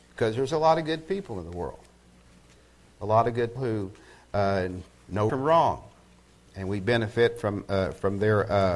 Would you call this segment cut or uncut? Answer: cut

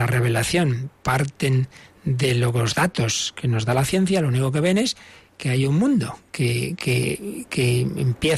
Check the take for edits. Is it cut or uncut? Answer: uncut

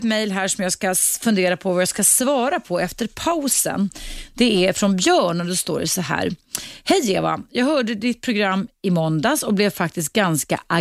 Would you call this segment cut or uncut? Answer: uncut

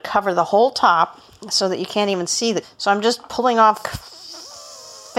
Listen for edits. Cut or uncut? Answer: cut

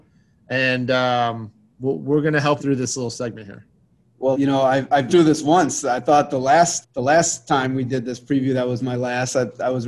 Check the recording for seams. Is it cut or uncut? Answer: cut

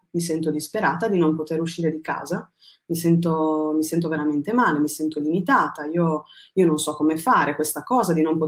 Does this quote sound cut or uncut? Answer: uncut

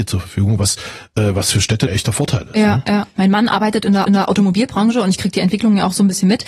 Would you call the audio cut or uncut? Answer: cut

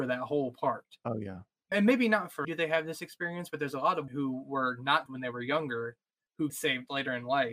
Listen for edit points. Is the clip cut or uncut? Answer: cut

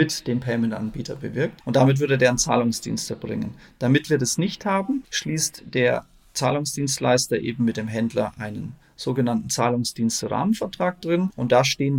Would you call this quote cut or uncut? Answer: uncut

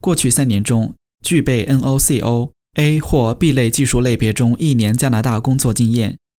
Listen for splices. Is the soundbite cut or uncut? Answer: uncut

